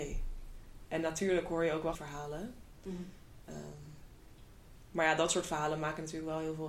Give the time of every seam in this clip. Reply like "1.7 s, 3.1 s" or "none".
1.9 s